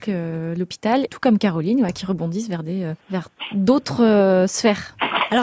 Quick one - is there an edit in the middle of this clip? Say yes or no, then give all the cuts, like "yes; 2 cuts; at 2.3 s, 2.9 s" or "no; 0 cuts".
yes; 2 cuts; at 1.1 s, 3.0 s